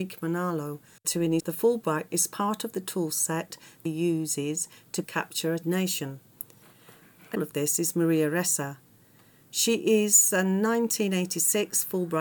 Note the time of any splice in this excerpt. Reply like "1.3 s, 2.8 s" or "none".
1.0 s, 1.4 s, 2.1 s, 3.9 s, 5.0 s, 5.6 s, 7.3 s